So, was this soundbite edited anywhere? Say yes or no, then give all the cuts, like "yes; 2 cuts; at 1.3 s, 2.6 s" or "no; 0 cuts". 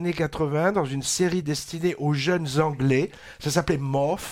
no; 0 cuts